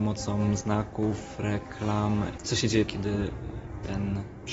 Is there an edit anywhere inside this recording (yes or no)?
yes